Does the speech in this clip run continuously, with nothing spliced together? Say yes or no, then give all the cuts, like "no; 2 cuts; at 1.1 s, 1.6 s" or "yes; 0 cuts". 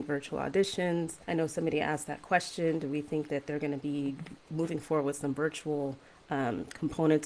no; 3 cuts; at 1.2 s, 4.4 s, 6.1 s